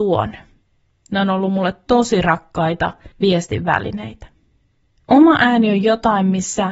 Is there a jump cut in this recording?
yes; 1 cut; at 3.1 s

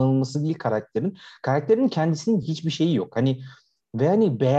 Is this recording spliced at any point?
no; 0 cuts

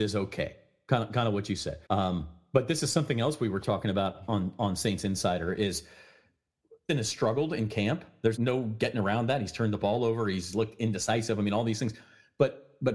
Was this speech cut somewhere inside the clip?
yes; 4 cuts; at 1.9 s, 6.9 s, 8.4 s, 10.5 s

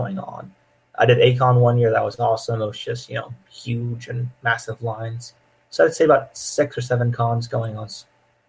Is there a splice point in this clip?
no; 0 cuts

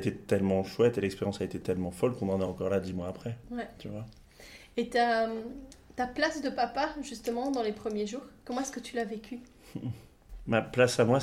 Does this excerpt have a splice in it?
no; 0 cuts

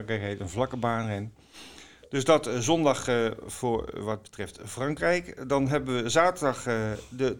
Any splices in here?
no; 0 cuts

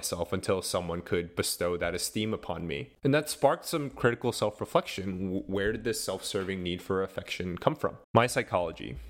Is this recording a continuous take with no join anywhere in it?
no; 1 cut; at 8.0 s

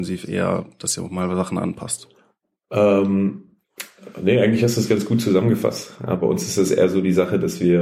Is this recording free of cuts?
yes; 0 cuts

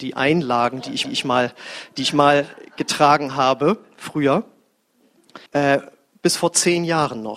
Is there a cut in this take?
yes; 2 cuts; at 1.0 s, 5.5 s

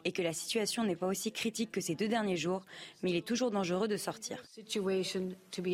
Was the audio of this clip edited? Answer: yes; 1 cut; at 4.5 s

